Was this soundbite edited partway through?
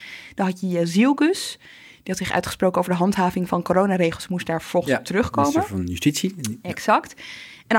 no; 0 cuts

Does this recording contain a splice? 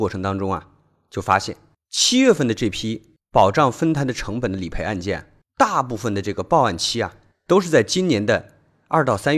no; 0 cuts

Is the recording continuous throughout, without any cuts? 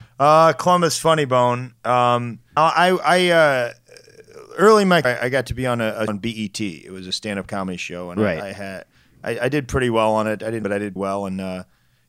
no; 5 cuts; at 2.6 s, 5.0 s, 6.1 s, 10.6 s, 11.0 s

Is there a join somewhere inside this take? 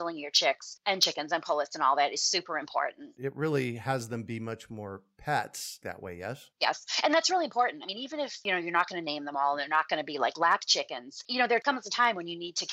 yes; 1 cut; at 5.8 s

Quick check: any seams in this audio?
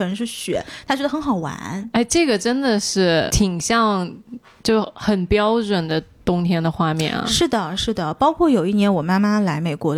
yes; 2 cuts; at 3.3 s, 7.8 s

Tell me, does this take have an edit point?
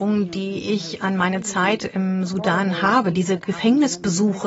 no; 0 cuts

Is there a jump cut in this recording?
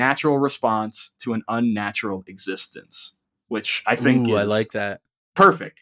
no; 0 cuts

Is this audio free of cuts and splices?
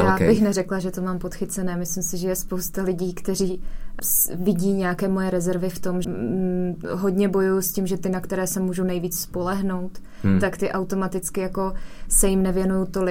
no; 2 cuts; at 4.0 s, 6.0 s

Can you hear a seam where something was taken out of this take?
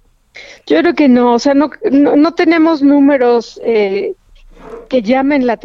no; 0 cuts

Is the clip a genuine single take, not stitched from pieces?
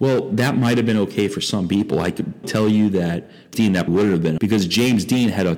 no; 4 cuts; at 2.4 s, 3.5 s, 3.9 s, 4.4 s

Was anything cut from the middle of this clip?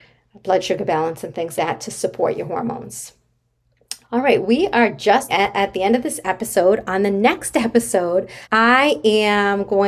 yes; 5 cuts; at 1.6 s, 4.0 s, 4.4 s, 5.3 s, 8.4 s

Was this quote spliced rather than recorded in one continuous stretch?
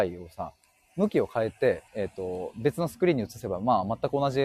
yes; 1 cut; at 1.9 s

